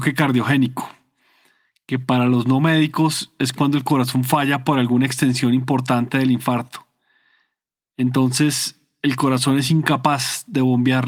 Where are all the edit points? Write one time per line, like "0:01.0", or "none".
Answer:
none